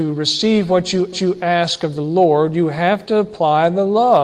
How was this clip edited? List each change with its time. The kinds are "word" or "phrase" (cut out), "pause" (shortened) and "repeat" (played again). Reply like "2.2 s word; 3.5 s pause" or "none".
1.1 s repeat